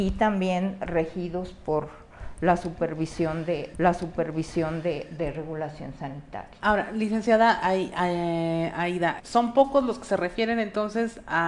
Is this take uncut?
no; 3 cuts; at 3.7 s, 6.6 s, 9.2 s

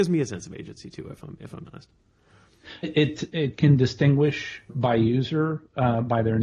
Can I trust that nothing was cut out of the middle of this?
no; 3 cuts; at 1.7 s, 2.8 s, 4.7 s

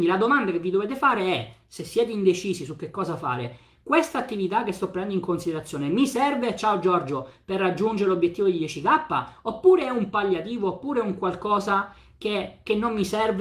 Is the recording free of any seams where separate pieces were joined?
yes; 0 cuts

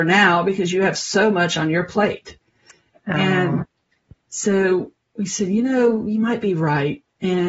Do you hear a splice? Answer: no; 0 cuts

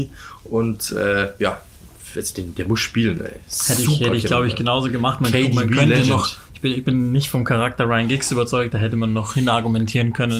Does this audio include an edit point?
no; 0 cuts

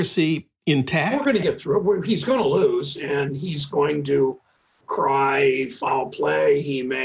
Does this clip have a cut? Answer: no; 0 cuts

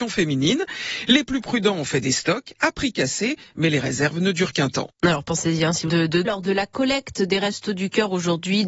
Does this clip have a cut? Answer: yes; 2 cuts; at 5.9 s, 6.2 s

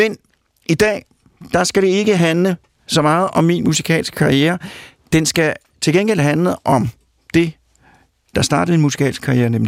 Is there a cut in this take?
no; 0 cuts

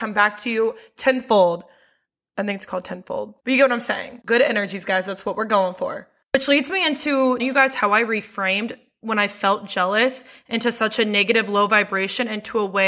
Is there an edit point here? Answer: yes; 2 cuts; at 3.4 s, 7.4 s

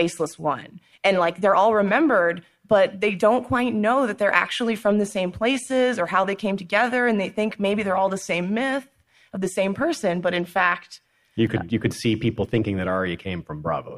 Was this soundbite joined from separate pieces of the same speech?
no; 0 cuts

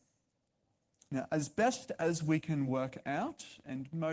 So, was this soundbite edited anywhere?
no; 0 cuts

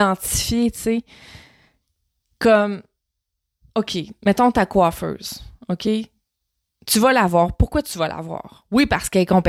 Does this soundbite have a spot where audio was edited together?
no; 0 cuts

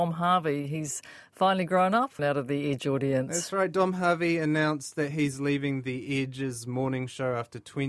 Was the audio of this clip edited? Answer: yes; 1 cut; at 2.2 s

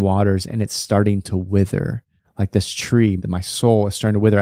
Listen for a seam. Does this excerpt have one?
yes; 1 cut; at 3.2 s

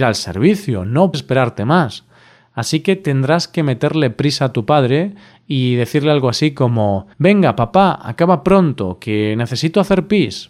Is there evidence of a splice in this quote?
yes; 2 cuts; at 1.1 s, 7.1 s

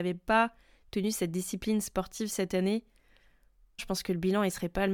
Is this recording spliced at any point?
yes; 1 cut; at 3.8 s

